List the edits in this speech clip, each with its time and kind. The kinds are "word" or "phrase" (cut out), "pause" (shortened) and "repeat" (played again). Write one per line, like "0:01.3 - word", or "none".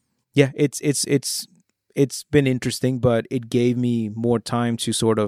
none